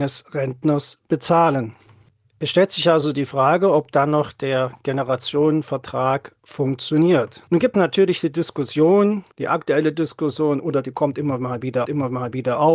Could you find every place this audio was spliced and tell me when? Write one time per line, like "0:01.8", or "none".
0:07.7
0:09.3
0:11.8